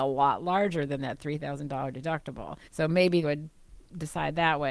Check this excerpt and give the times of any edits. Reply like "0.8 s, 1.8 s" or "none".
2.6 s, 3.2 s